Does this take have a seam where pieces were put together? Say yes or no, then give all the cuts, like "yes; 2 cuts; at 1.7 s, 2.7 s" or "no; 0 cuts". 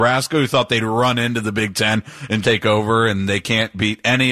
yes; 1 cut; at 2.4 s